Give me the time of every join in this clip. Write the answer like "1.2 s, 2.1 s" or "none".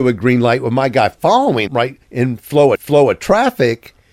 1.7 s, 2.0 s, 2.7 s